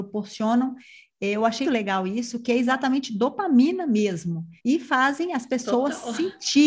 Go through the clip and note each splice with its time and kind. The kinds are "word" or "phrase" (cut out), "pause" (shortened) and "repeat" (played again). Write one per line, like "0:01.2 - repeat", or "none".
0:01.6 - word
0:04.6 - pause